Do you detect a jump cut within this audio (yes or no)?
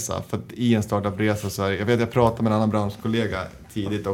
no